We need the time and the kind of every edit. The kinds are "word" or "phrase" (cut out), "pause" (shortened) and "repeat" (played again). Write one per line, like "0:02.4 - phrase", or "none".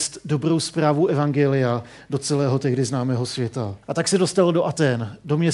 0:03.8 - pause